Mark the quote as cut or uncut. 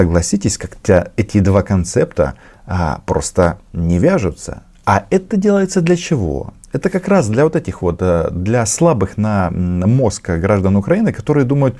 uncut